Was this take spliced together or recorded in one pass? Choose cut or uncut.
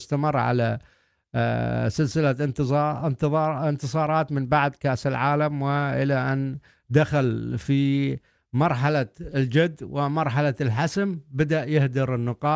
uncut